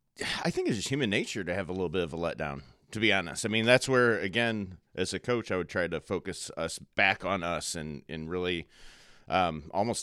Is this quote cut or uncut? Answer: uncut